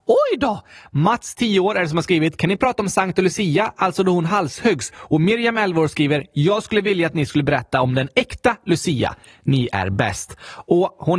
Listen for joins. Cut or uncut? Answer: uncut